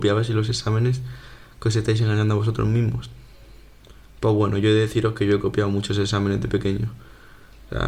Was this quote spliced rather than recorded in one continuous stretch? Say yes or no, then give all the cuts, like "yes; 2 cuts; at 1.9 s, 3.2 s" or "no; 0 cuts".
no; 0 cuts